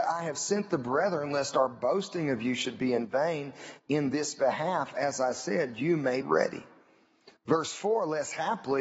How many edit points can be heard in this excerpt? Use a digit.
1